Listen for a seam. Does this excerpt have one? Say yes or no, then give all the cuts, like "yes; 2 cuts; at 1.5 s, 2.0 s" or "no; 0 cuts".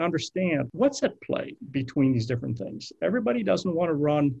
no; 0 cuts